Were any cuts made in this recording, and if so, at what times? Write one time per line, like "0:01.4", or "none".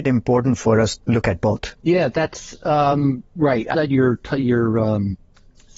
0:01.0
0:01.8
0:03.3
0:03.7